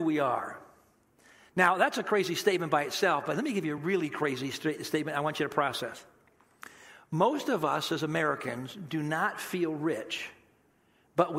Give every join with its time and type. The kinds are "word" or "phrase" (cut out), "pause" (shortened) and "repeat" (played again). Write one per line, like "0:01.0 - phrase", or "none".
none